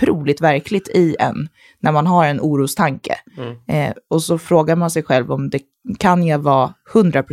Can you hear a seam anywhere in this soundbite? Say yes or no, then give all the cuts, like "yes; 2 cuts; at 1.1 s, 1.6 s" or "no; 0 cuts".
no; 0 cuts